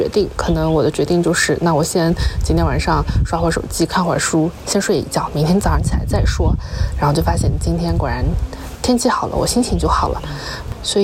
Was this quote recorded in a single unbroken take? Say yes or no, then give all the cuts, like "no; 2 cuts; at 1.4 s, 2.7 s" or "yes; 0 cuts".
yes; 0 cuts